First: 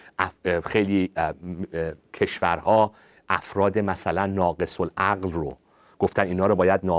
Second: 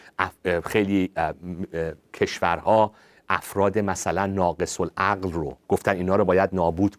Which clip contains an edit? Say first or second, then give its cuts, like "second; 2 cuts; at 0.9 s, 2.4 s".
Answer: second; 1 cut; at 5.6 s